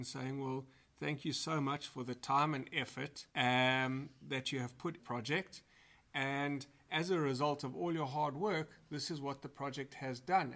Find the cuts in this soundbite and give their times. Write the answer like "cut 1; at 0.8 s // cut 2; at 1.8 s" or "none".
cut 1; at 3.3 s // cut 2; at 5.0 s